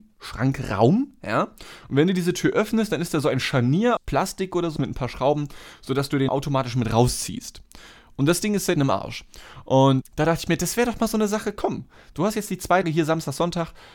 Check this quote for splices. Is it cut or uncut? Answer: cut